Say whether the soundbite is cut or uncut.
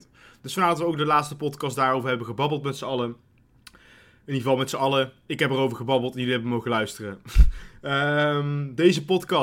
uncut